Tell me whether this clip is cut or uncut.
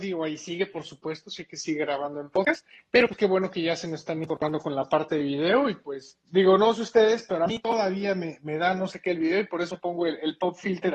uncut